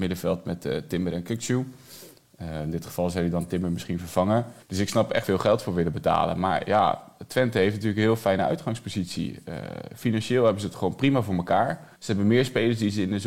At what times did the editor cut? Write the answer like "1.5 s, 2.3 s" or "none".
4.6 s, 5.2 s, 12.0 s